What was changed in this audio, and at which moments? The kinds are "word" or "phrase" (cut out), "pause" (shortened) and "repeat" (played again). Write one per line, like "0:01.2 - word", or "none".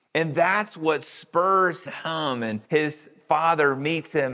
0:01.9 - phrase
0:02.6 - pause